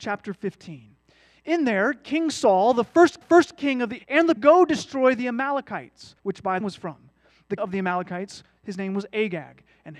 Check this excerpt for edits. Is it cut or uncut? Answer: cut